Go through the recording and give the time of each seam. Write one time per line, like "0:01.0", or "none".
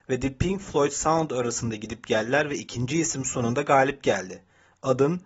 none